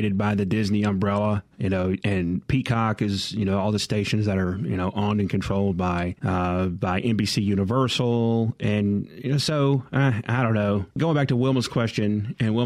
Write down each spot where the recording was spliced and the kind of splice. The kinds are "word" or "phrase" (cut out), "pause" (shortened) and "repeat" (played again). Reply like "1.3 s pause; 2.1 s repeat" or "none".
2.0 s word; 10.9 s pause